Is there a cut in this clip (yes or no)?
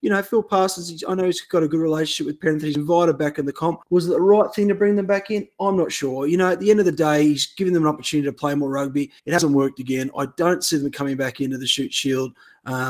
yes